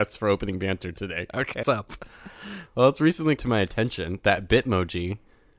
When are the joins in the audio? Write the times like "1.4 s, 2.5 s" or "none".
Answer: 1.6 s, 3.4 s